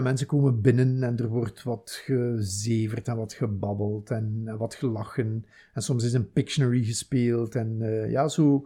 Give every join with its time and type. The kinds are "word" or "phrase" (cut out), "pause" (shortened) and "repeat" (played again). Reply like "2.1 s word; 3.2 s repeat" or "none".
none